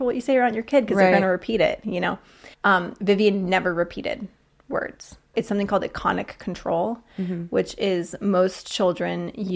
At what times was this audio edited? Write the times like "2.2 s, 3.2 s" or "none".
2.5 s, 5.3 s

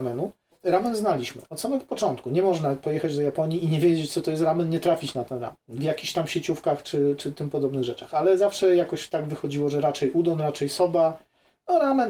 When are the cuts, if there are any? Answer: 5.6 s

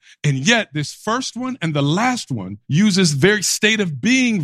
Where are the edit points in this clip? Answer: 2.6 s

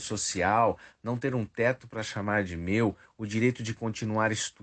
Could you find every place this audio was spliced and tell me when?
none

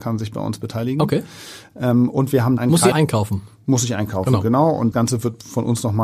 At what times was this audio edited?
2.6 s, 2.9 s, 4.9 s

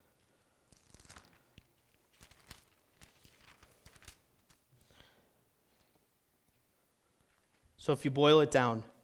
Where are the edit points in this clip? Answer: none

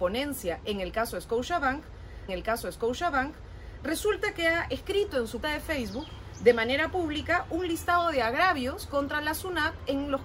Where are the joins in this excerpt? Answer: 2.3 s, 5.4 s

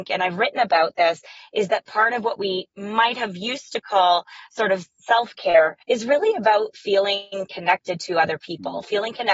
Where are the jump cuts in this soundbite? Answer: 5.8 s

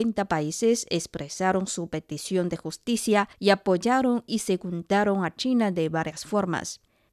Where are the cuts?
3.3 s

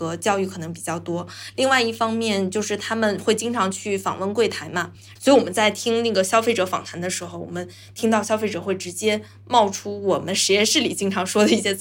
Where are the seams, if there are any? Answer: none

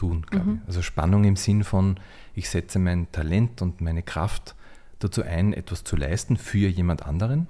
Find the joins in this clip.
none

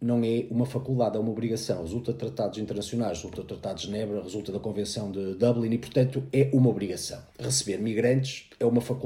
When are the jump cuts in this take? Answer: 7.3 s

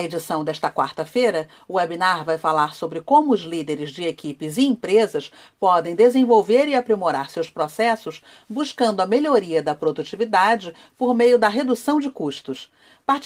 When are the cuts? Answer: none

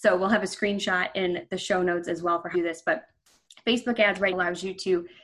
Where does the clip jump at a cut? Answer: 2.5 s, 4.3 s

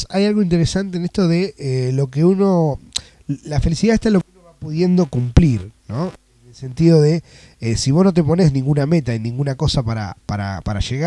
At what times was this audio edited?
none

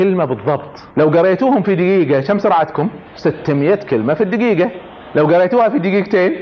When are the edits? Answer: 0.9 s, 3.1 s

